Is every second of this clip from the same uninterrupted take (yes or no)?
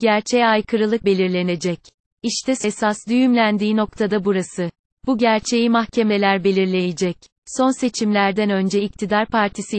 no